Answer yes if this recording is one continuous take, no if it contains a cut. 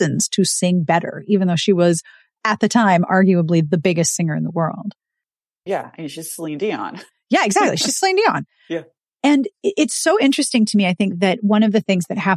yes